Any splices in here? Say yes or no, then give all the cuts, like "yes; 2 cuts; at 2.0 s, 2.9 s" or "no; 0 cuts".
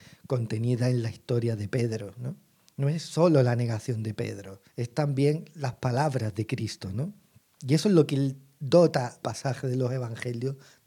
yes; 2 cuts; at 4.7 s, 9.2 s